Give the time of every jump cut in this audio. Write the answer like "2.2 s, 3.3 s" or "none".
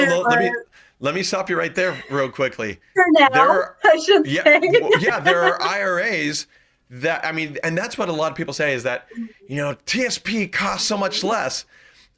none